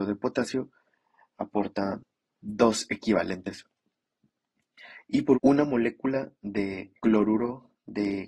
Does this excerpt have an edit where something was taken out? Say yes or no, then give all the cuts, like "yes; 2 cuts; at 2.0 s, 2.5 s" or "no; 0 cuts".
yes; 2 cuts; at 5.3 s, 7.0 s